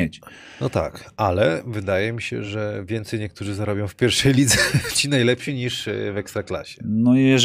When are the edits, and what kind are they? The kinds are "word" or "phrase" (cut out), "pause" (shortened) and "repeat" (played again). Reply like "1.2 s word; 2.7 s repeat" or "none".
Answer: none